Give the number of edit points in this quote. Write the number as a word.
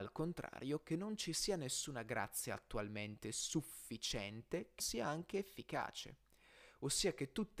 one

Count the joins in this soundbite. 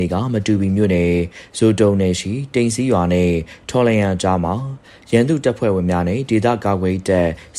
zero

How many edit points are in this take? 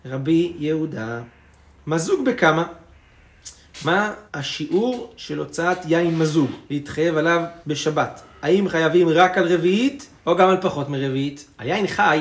four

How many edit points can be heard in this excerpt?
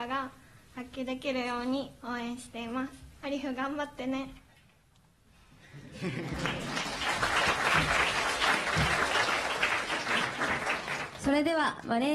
one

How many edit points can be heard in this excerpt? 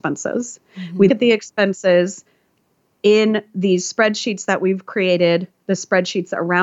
one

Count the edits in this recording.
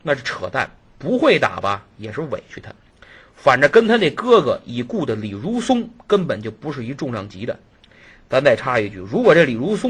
zero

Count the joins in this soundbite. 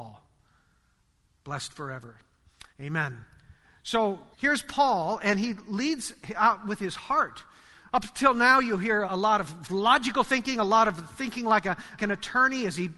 four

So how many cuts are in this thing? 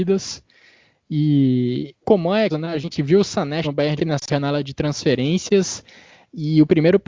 five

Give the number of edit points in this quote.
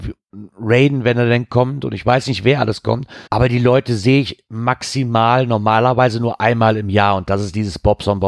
one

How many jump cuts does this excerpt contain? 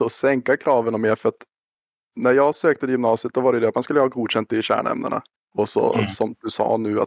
zero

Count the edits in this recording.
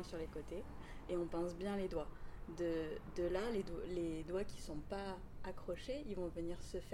one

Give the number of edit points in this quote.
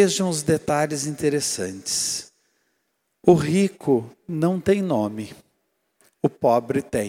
zero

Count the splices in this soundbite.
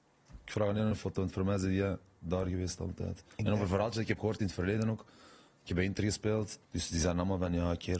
two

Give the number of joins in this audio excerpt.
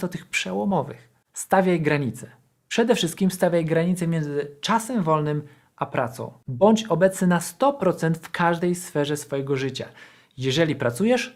zero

